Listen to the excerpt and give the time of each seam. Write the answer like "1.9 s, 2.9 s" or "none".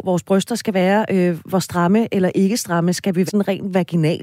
3.3 s